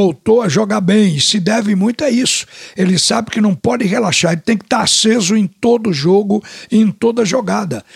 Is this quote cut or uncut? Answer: uncut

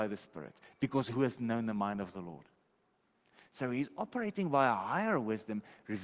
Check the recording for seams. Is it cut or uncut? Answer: uncut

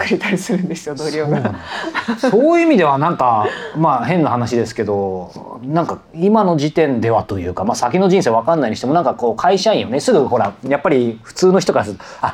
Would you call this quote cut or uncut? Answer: cut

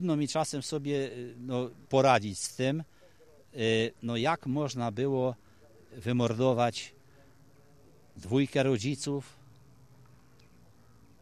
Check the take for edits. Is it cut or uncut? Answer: cut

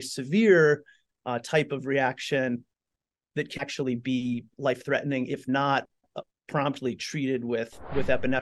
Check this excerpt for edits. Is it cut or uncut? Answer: uncut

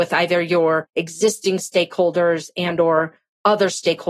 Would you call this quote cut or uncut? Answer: uncut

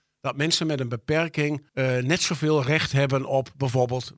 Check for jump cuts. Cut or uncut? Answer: cut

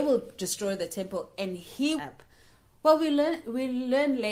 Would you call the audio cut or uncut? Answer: cut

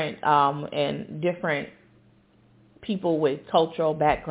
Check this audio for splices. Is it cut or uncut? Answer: uncut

